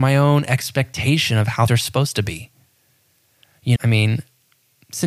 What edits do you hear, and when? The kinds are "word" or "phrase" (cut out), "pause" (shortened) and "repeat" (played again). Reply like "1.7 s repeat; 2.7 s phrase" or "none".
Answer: 1.7 s word; 3.8 s word